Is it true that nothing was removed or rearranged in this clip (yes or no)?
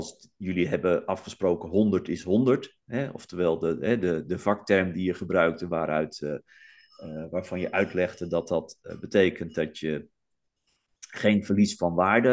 yes